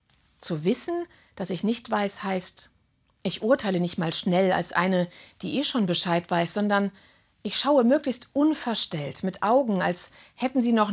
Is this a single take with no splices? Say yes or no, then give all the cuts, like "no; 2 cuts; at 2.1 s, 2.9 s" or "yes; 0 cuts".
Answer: yes; 0 cuts